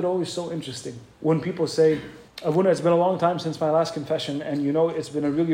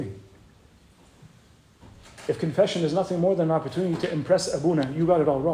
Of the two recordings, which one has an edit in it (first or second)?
first